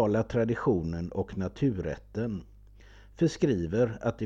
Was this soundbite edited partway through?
no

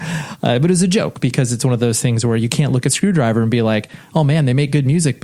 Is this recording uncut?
yes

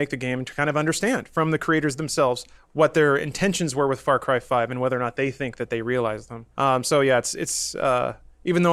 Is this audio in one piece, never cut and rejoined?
no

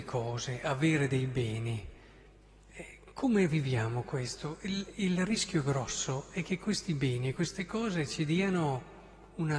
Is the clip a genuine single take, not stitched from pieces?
yes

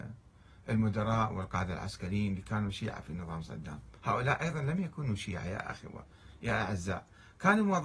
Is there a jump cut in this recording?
yes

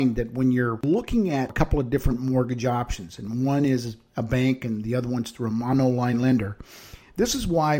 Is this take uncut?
yes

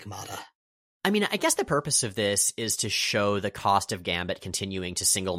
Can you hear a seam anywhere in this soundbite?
no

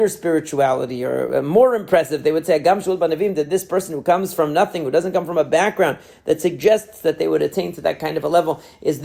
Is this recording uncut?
yes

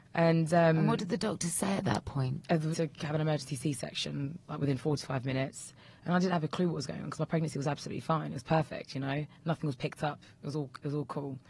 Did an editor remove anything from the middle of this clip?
yes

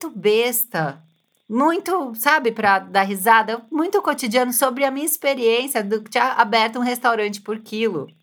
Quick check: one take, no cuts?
yes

